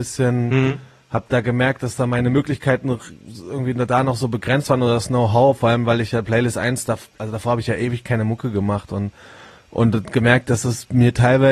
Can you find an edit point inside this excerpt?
no; 0 cuts

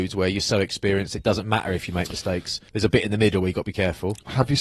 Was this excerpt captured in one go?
no; 1 cut; at 2.7 s

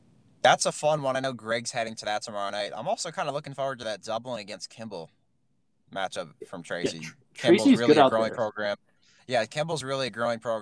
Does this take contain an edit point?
no; 0 cuts

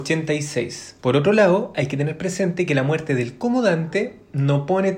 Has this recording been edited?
yes; 1 cut; at 1.0 s

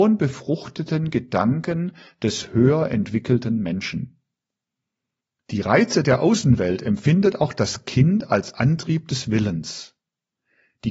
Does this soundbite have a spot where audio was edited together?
no; 0 cuts

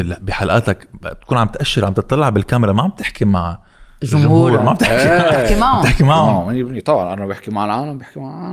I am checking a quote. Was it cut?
no; 0 cuts

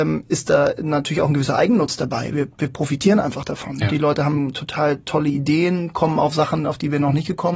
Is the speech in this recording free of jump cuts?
yes; 0 cuts

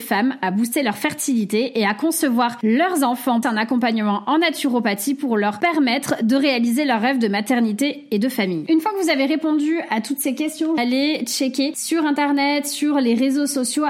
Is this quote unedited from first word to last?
no; 2 cuts; at 3.4 s, 10.8 s

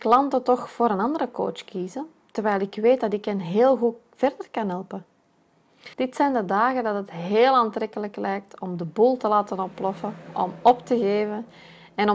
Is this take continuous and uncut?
no; 1 cut; at 5.9 s

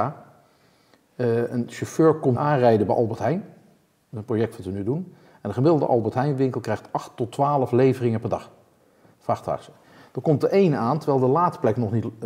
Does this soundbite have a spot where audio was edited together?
yes; 1 cut; at 2.4 s

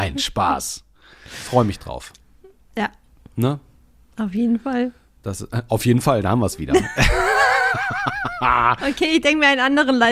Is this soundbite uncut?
yes; 0 cuts

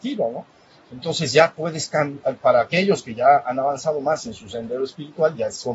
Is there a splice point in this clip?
no; 0 cuts

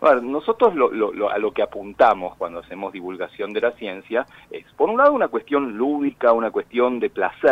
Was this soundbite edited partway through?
no; 0 cuts

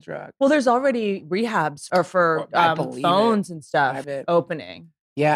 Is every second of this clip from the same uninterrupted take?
no; 2 cuts; at 1.9 s, 4.0 s

